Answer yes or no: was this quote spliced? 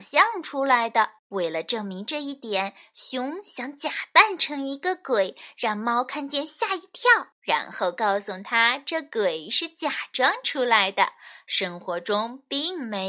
yes